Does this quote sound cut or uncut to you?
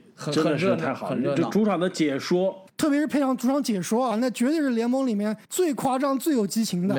cut